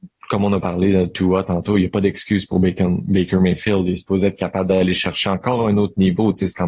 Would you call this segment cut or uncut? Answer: uncut